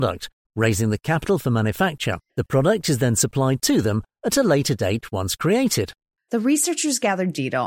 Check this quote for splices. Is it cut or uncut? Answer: cut